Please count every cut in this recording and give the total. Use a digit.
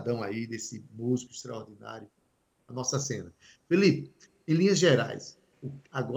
0